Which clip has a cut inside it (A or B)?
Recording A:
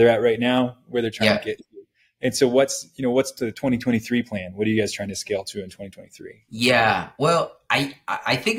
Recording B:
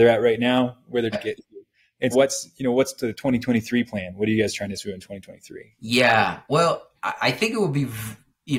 B